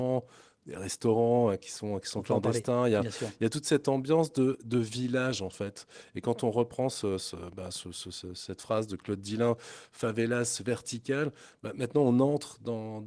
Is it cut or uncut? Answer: uncut